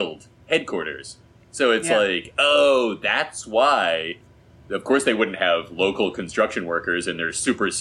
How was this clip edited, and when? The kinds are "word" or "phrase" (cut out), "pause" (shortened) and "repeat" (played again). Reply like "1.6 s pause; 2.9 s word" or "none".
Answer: none